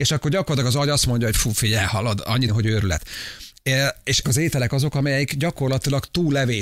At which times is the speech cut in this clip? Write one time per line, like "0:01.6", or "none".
0:02.5
0:04.2